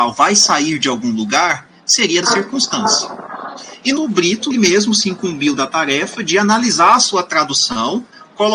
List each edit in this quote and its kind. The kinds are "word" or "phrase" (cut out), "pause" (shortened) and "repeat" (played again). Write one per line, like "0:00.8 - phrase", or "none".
0:02.2 - word
0:04.0 - word
0:04.5 - word